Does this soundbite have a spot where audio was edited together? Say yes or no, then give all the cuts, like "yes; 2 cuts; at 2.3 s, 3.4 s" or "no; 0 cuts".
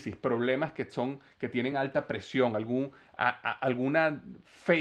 no; 0 cuts